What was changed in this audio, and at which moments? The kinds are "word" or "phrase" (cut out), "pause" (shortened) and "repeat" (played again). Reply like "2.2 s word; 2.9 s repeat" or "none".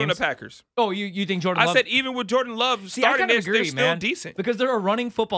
none